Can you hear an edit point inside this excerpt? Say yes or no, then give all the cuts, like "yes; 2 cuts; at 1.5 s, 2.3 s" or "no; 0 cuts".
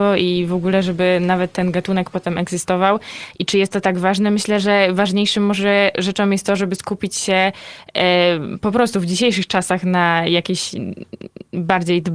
no; 0 cuts